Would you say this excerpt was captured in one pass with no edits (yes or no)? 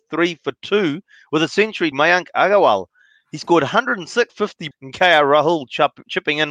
no